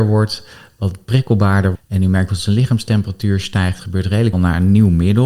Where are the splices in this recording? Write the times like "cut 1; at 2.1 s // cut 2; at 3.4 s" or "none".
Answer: cut 1; at 1.7 s // cut 2; at 2.3 s // cut 3; at 3.8 s // cut 4; at 4.3 s